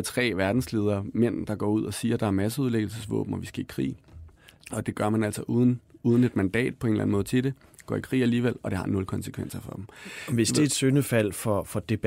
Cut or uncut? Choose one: uncut